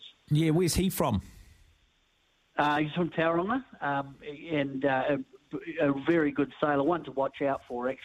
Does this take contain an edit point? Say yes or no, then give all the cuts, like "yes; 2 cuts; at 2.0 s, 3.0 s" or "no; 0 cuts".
no; 0 cuts